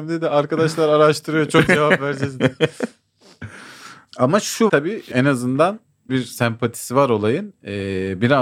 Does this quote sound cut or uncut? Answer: cut